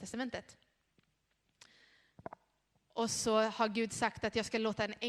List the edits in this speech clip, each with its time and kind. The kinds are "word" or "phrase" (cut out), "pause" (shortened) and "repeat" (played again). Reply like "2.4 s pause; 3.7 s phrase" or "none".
none